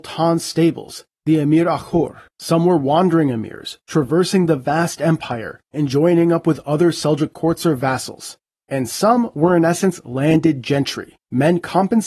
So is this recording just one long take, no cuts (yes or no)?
no